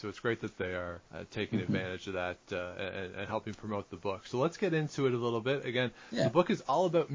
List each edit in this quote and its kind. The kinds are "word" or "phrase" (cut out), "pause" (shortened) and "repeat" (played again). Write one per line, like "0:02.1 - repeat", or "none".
0:01.1 - pause